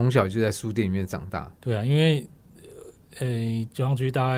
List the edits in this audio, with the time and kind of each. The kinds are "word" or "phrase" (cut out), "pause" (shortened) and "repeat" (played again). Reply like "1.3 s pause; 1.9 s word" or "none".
1.6 s pause